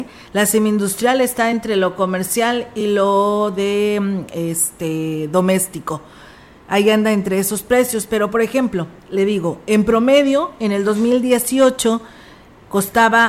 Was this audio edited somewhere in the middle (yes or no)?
no